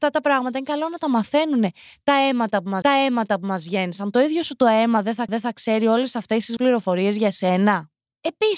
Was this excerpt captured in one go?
no; 3 cuts; at 2.8 s, 5.3 s, 6.6 s

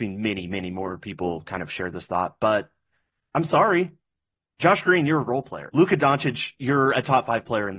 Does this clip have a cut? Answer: yes; 1 cut; at 5.7 s

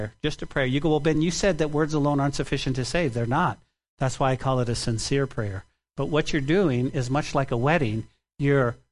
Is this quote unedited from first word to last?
yes; 0 cuts

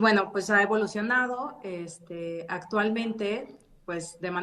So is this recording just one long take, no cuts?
yes; 0 cuts

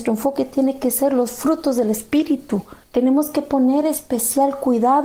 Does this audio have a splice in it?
yes; 1 cut; at 2.8 s

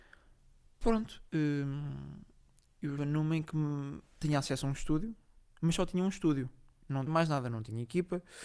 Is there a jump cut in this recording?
yes; 2 cuts; at 3.0 s, 7.1 s

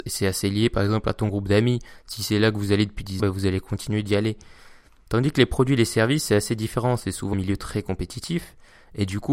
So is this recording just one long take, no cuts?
no; 2 cuts; at 3.2 s, 7.3 s

